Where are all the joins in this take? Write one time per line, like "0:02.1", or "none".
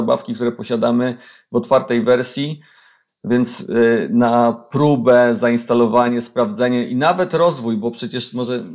none